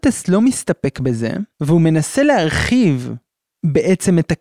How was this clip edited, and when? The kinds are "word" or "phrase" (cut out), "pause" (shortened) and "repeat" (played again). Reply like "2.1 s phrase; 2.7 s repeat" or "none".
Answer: 1.5 s pause